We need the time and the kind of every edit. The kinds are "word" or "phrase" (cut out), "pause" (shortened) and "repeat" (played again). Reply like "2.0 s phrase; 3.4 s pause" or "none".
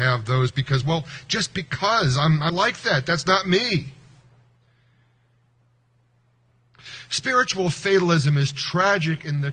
2.5 s word